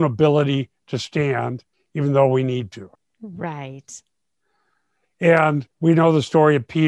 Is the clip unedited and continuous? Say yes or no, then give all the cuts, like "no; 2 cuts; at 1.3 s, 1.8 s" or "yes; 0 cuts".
no; 3 cuts; at 1.7 s, 2.9 s, 5.7 s